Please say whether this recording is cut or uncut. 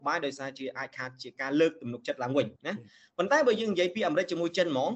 cut